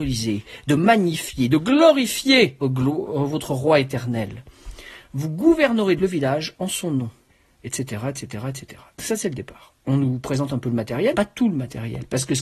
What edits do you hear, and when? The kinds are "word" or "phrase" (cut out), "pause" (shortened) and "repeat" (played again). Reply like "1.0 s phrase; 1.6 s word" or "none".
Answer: 2.6 s word; 6.0 s word; 7.3 s pause; 11.1 s phrase